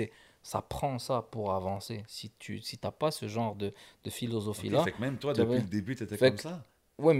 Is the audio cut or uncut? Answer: uncut